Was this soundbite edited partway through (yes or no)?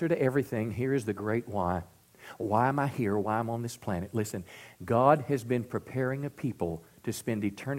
no